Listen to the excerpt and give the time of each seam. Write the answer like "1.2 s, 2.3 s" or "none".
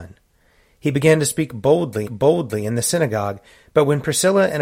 2.0 s